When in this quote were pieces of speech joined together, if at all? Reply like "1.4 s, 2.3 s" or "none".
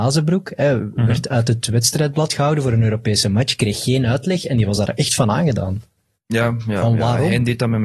none